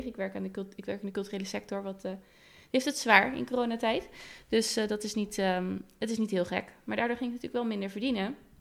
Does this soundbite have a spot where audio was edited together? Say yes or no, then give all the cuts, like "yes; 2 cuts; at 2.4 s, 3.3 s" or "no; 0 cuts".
no; 0 cuts